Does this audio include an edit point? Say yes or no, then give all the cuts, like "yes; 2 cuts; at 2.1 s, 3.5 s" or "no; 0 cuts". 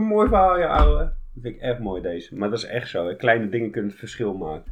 no; 0 cuts